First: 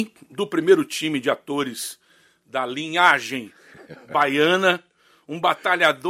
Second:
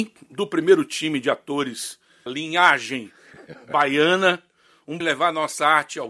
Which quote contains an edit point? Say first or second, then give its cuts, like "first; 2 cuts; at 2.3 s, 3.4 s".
second; 2 cuts; at 2.3 s, 5.0 s